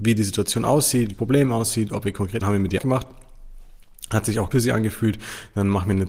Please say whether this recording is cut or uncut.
cut